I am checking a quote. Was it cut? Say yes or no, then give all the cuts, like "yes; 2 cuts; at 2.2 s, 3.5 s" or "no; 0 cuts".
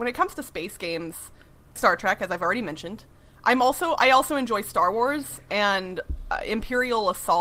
yes; 1 cut; at 1.8 s